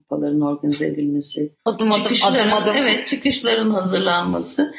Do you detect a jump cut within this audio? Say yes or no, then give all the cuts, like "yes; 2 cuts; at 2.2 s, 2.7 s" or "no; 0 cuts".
yes; 1 cut; at 1.6 s